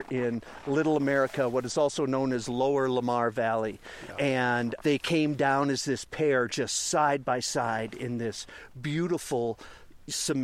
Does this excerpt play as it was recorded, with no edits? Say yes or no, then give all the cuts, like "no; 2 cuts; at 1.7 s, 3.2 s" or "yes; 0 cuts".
yes; 0 cuts